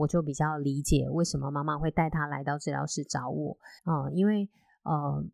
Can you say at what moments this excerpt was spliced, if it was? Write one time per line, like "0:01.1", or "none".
0:03.8